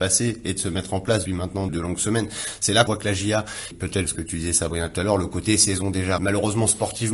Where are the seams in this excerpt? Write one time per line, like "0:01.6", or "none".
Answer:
0:01.3
0:01.7
0:02.9
0:03.7
0:04.0
0:06.2